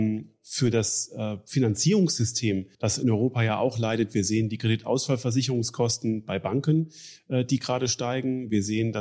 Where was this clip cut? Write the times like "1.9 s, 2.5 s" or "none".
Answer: 2.7 s